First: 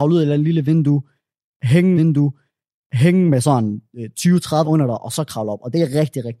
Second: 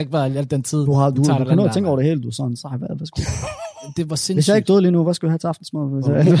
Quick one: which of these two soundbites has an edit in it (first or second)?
first